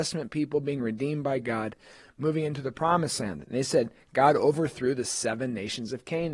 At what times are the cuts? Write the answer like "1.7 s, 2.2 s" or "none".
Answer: none